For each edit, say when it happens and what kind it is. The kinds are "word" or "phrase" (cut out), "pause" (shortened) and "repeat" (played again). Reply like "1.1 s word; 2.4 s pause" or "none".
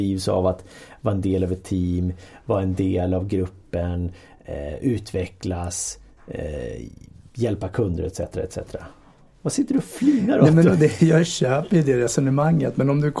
none